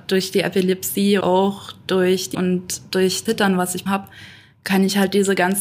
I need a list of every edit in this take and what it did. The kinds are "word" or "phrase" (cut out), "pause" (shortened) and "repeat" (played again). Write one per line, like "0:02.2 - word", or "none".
0:01.2 - word
0:02.3 - word
0:03.3 - word
0:03.9 - word